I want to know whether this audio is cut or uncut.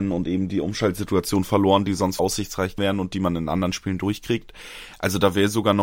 cut